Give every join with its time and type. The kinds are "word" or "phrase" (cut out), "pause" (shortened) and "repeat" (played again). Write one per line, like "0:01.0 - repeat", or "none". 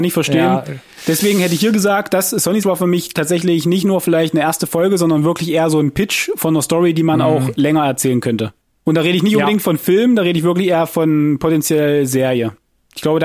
0:02.6 - word
0:08.6 - pause